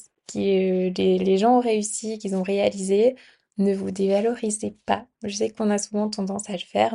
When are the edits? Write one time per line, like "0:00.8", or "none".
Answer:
none